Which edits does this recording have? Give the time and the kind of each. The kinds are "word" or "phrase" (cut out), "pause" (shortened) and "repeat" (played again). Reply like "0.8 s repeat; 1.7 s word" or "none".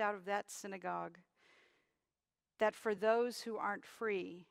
none